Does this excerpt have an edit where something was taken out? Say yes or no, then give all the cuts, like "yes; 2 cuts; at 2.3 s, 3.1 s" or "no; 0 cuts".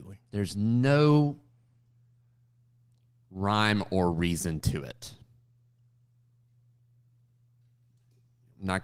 no; 0 cuts